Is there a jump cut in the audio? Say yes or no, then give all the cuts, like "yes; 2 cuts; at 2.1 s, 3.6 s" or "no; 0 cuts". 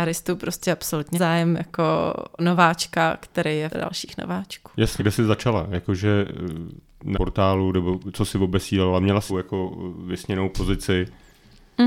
yes; 6 cuts; at 1.1 s, 2.4 s, 3.7 s, 5.0 s, 7.1 s, 9.3 s